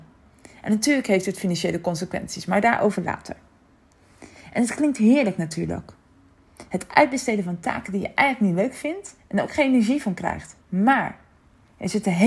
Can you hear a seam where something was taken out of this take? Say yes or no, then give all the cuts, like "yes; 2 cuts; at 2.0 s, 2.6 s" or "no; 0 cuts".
yes; 1 cut; at 10.6 s